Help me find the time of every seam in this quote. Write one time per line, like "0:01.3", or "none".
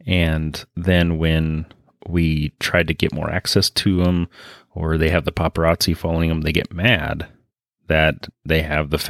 none